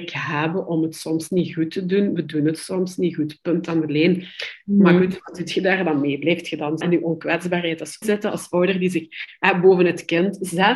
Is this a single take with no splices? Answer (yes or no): no